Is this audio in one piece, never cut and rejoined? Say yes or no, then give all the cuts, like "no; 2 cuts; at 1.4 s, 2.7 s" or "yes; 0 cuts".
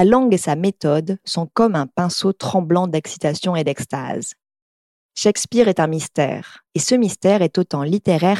no; 1 cut; at 6.7 s